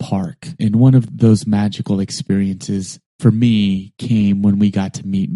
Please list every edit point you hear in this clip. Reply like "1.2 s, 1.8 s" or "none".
3.1 s